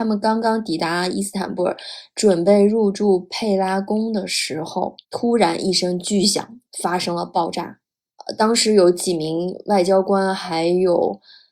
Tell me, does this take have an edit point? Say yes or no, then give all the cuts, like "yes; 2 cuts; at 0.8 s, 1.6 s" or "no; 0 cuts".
yes; 2 cuts; at 5.0 s, 6.7 s